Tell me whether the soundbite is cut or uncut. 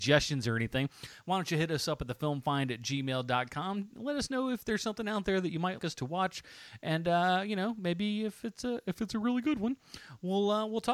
cut